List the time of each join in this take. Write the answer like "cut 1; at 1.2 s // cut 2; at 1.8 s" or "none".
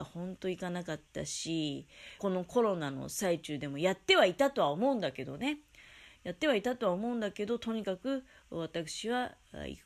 cut 1; at 2.2 s